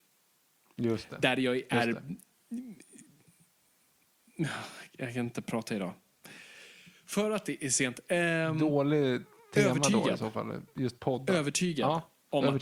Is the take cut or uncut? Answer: uncut